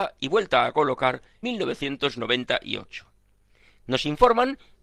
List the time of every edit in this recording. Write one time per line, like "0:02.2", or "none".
0:01.4